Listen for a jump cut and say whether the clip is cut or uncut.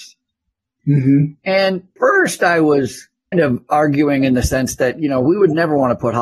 cut